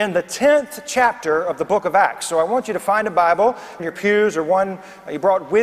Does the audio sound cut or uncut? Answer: cut